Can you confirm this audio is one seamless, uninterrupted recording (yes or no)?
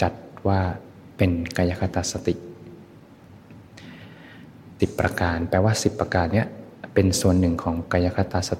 no